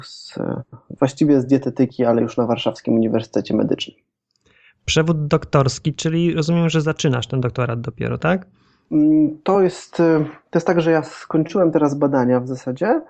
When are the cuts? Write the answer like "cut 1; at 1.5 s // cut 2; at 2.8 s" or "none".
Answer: none